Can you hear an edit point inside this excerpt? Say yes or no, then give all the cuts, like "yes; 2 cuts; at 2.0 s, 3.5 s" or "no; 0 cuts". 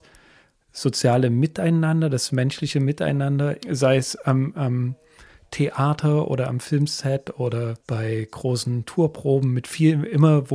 yes; 2 cuts; at 3.6 s, 7.8 s